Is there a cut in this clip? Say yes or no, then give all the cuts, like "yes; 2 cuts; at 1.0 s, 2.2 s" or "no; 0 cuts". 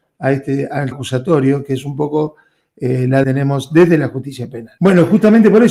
yes; 2 cuts; at 0.9 s, 3.2 s